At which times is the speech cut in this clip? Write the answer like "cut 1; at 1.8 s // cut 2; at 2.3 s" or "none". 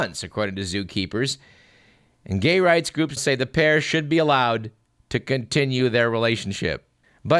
cut 1; at 3.2 s